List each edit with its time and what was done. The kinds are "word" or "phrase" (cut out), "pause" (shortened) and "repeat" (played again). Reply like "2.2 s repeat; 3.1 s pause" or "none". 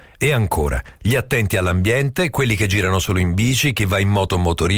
1.0 s pause